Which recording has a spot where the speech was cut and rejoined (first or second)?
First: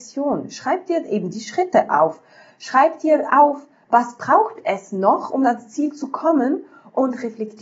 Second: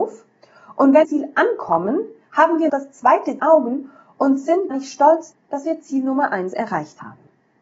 second